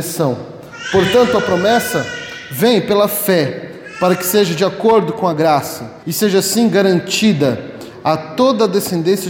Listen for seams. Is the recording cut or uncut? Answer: cut